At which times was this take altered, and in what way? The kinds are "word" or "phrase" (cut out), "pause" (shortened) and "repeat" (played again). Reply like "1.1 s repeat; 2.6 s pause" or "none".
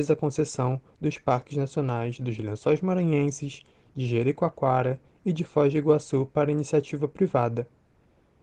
none